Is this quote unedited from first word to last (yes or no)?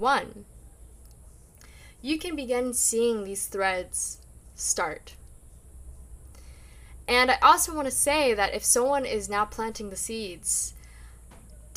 yes